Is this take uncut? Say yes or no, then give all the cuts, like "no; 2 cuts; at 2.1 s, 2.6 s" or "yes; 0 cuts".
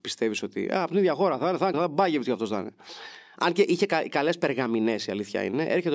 no; 1 cut; at 1.7 s